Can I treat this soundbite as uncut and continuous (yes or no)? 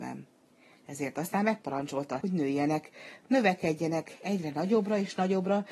no